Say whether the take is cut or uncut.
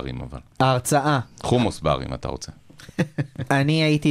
uncut